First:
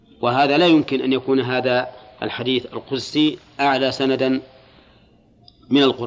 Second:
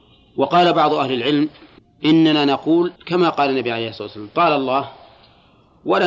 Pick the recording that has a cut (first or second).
second